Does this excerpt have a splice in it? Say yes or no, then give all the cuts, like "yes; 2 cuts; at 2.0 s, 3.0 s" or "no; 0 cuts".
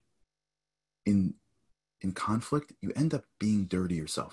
no; 0 cuts